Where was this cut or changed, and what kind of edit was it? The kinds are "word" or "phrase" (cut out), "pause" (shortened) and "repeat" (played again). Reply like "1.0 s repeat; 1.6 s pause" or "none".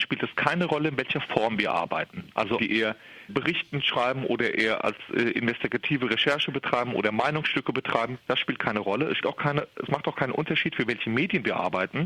2.6 s phrase; 3.3 s word; 9.2 s word